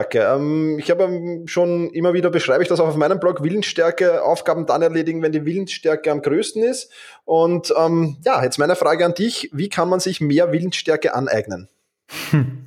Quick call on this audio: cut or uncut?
uncut